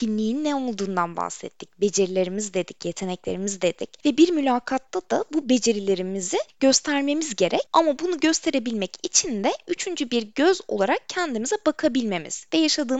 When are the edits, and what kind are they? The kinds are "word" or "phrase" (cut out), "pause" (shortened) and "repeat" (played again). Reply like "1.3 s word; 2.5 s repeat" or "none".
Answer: 7.7 s pause